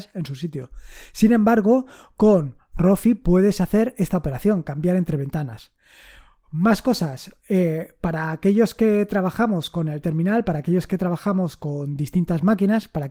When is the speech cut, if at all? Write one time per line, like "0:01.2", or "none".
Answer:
none